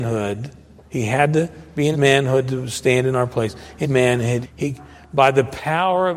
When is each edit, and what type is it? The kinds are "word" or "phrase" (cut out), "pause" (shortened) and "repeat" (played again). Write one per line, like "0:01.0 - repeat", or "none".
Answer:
0:01.9 - word
0:03.8 - word
0:04.4 - word